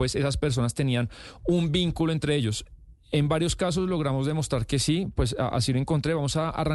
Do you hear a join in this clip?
no; 0 cuts

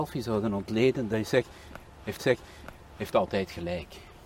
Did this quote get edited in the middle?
yes; 1 cut; at 2.2 s

